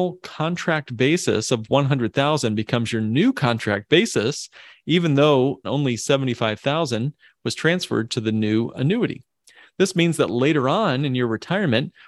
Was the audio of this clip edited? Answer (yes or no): no